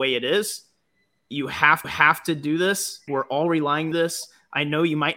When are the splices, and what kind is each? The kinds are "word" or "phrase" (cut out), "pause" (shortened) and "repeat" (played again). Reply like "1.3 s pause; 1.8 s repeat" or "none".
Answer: 1.8 s repeat; 3.1 s word; 3.9 s phrase